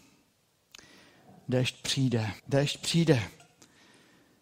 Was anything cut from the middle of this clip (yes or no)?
yes